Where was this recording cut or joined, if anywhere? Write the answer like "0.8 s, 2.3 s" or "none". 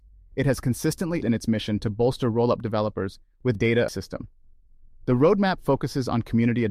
1.2 s, 3.6 s, 3.9 s